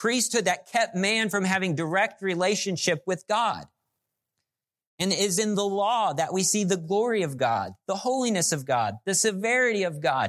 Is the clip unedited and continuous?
yes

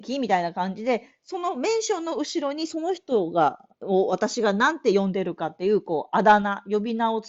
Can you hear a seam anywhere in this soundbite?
yes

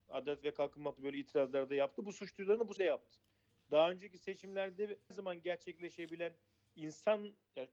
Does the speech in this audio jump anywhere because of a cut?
yes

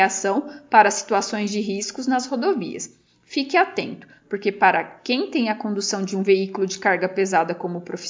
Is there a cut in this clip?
no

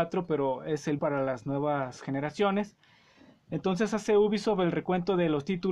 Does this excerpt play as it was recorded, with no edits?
no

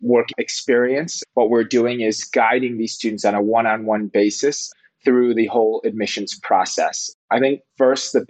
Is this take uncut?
yes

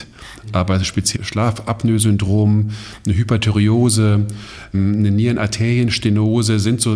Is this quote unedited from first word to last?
no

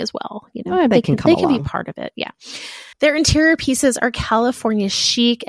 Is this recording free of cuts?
no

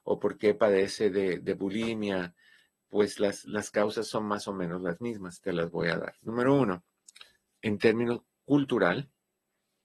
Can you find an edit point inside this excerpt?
no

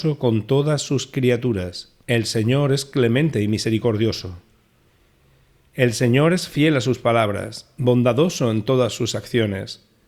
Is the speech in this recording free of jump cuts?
no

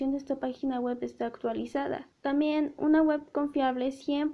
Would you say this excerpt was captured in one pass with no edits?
no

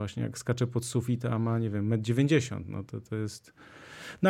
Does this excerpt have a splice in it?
no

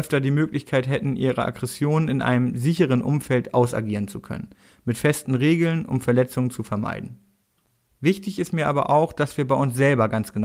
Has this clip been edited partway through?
no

